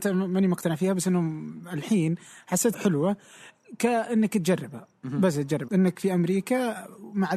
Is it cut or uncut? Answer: cut